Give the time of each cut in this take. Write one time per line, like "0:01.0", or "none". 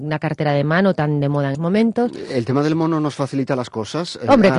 0:01.5